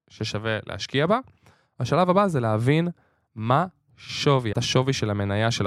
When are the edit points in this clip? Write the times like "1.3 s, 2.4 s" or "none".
4.5 s